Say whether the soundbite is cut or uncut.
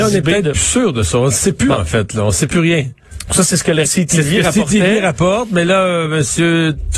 cut